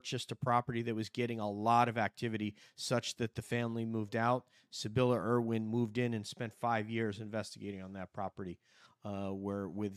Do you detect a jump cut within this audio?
no; 0 cuts

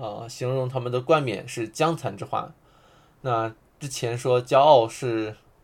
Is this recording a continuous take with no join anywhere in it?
yes; 0 cuts

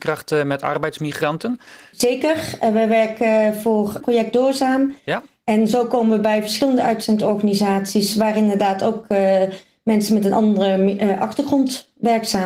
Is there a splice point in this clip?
no; 0 cuts

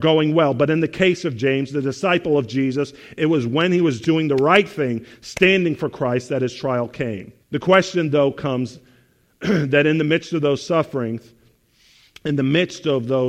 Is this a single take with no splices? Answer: no; 1 cut; at 7.4 s

